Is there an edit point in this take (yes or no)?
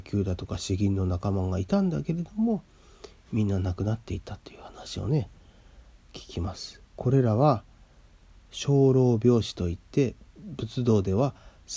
yes